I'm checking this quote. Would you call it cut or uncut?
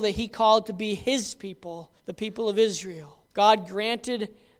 cut